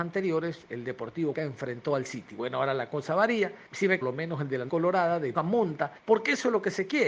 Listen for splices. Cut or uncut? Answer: cut